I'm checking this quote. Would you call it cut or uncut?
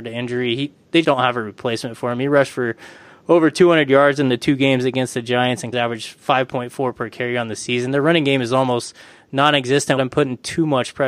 cut